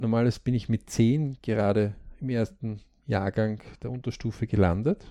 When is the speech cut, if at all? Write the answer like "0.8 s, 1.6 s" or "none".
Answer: none